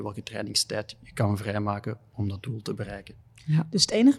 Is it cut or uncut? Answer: uncut